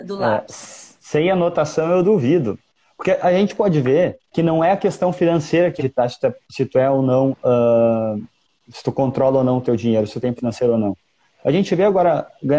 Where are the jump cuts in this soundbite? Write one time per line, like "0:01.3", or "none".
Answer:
0:04.3
0:05.8
0:10.4